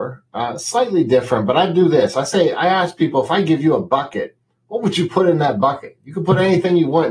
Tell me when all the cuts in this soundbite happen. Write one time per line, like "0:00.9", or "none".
none

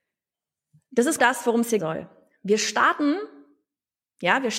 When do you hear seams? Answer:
0:01.2
0:01.8

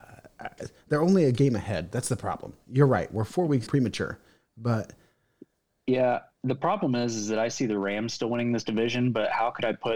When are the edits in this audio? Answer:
0:03.7

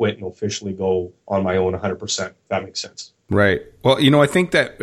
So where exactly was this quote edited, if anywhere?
0:01.2

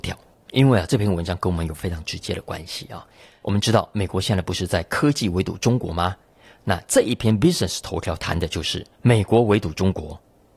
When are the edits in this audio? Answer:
0:08.9

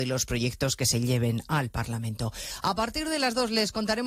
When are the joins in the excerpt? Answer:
none

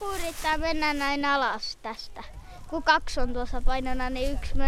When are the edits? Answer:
none

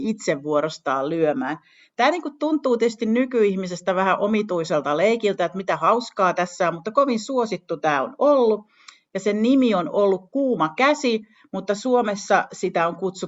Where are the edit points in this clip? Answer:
none

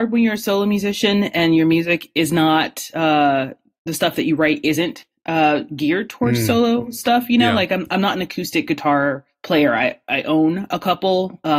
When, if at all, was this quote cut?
none

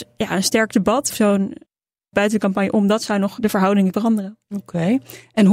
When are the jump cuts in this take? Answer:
0:01.1
0:02.1
0:03.4
0:03.9

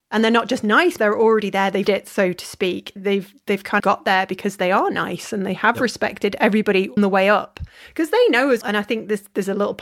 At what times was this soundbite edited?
0:01.0
0:01.9
0:03.0
0:03.8
0:07.0
0:08.6

